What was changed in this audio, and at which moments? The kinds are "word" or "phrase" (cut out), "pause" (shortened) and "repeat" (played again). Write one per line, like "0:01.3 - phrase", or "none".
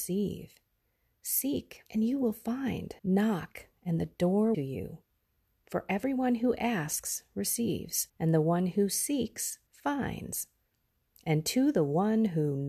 0:01.9 - pause
0:03.0 - pause
0:04.5 - phrase
0:08.1 - pause
0:09.7 - pause